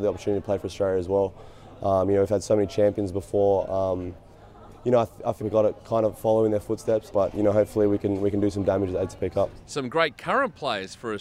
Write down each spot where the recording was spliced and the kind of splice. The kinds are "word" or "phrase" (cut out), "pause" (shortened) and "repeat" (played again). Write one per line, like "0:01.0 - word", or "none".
0:05.4 - word